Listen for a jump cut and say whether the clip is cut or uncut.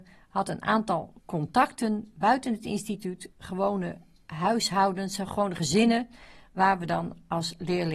uncut